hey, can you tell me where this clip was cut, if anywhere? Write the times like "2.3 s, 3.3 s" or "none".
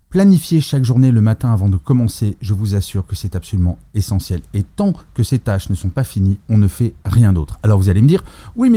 none